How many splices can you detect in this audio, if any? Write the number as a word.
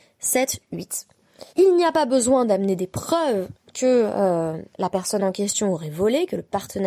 two